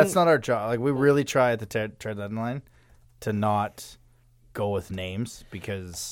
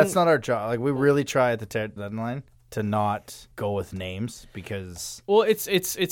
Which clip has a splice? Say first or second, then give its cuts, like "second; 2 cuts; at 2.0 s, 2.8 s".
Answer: second; 3 cuts; at 2.0 s, 2.5 s, 3.5 s